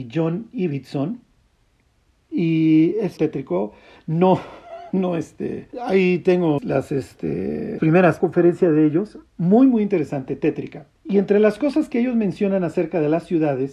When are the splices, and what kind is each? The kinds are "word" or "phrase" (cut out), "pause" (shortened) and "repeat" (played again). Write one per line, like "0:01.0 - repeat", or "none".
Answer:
0:03.2 - phrase
0:05.7 - pause
0:06.6 - word
0:07.8 - word
0:08.2 - phrase
0:09.3 - pause
0:11.0 - pause